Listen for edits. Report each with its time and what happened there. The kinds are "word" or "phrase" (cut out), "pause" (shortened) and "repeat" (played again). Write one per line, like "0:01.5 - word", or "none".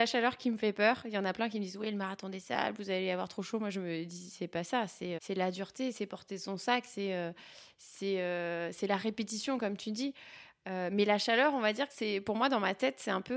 0:05.2 - word